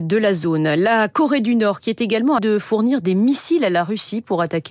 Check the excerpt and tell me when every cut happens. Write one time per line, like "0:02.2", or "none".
0:02.4